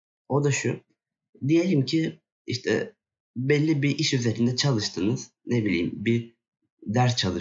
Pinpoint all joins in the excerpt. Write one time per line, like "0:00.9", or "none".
none